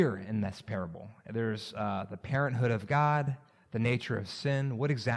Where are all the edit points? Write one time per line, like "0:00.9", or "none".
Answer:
none